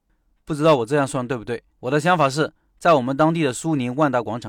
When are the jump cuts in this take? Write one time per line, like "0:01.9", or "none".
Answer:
0:01.7